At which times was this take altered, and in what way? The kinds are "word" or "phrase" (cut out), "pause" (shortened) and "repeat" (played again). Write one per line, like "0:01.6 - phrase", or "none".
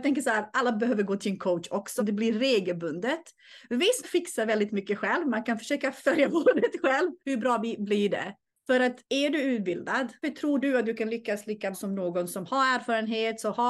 0:02.0 - phrase
0:04.0 - phrase
0:07.2 - pause
0:08.5 - pause
0:09.0 - pause
0:10.2 - word
0:11.7 - word